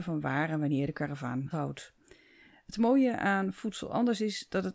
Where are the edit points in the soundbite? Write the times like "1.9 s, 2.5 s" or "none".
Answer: 1.5 s